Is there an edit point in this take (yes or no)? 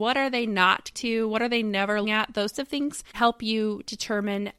yes